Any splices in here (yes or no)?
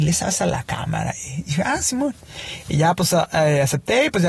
no